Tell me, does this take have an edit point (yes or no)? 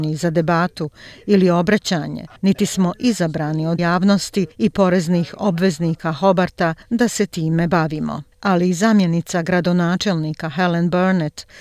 yes